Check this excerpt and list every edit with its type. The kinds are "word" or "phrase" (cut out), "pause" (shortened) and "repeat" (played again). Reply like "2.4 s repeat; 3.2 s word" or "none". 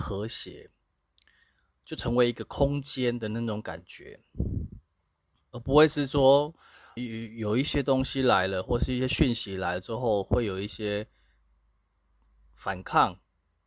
7.0 s word